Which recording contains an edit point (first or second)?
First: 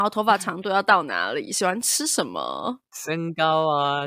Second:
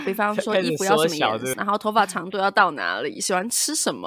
second